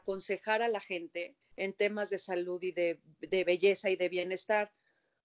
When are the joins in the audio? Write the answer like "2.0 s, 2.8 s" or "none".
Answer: 1.4 s